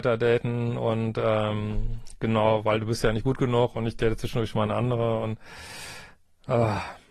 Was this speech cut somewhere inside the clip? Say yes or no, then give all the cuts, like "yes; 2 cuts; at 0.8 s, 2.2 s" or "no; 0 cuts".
no; 0 cuts